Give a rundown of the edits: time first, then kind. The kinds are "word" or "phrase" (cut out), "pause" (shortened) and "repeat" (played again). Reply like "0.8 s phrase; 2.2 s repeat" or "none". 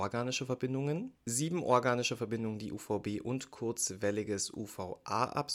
none